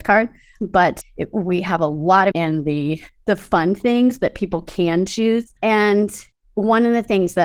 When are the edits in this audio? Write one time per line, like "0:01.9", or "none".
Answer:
0:01.0
0:02.3
0:05.6